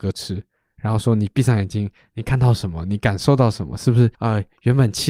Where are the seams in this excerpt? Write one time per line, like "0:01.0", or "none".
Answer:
0:04.1